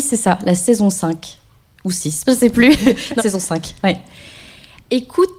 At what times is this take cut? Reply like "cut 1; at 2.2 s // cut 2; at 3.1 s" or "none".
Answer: cut 1; at 2.2 s // cut 2; at 3.2 s